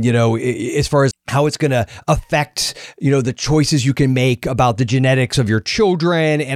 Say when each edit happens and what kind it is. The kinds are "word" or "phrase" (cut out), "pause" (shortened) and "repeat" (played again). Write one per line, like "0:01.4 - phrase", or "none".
0:01.1 - word